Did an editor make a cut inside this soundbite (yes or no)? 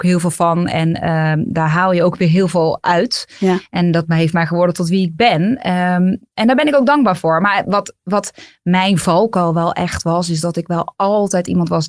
no